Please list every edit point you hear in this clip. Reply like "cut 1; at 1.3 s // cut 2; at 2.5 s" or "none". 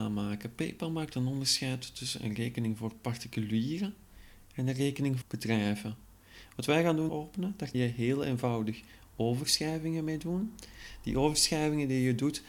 cut 1; at 5.2 s // cut 2; at 7.1 s // cut 3; at 7.7 s